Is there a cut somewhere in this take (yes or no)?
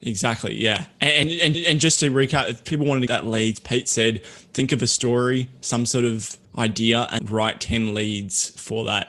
yes